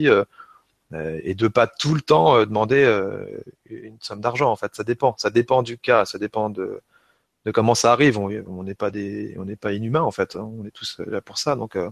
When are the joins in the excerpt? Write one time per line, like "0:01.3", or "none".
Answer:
none